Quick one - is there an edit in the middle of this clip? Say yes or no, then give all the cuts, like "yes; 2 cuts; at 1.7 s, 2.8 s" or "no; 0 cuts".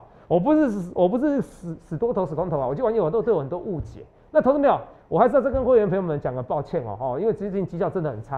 no; 0 cuts